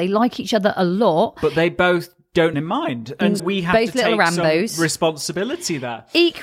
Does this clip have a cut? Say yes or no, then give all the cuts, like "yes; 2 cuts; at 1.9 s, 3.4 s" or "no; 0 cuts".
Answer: yes; 2 cuts; at 2.5 s, 3.4 s